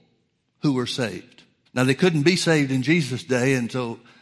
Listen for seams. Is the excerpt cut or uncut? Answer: cut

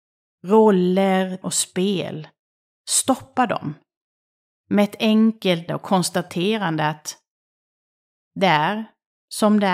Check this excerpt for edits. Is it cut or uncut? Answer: cut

